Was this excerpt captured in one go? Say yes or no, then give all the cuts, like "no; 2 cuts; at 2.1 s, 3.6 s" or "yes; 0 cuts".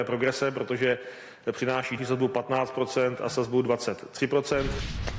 no; 1 cut; at 2.0 s